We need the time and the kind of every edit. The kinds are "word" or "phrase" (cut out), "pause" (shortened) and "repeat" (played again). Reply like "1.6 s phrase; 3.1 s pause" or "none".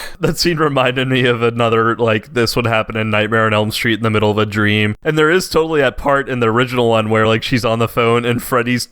none